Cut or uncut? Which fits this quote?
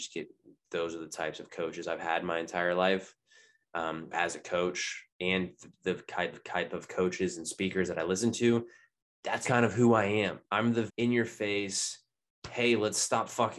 cut